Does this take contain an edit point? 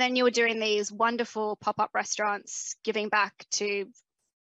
no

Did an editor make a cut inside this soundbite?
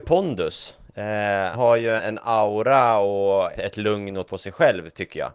yes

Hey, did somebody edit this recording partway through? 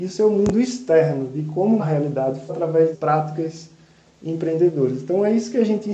yes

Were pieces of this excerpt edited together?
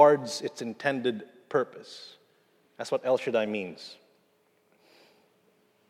no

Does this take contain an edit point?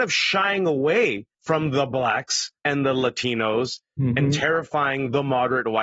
yes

